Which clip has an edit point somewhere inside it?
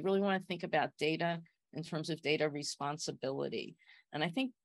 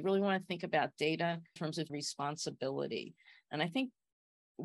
second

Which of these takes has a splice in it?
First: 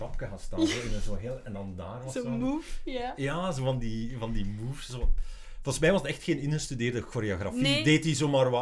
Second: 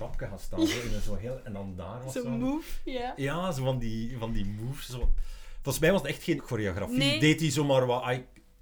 second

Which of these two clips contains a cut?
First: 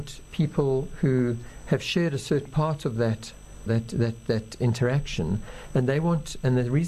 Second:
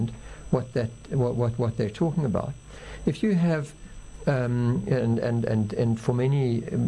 first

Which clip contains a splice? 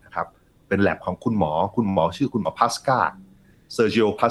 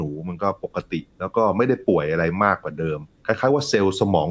second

